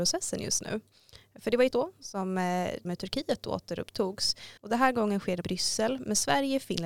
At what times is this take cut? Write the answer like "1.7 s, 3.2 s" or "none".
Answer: 1.7 s, 2.8 s, 4.6 s, 5.4 s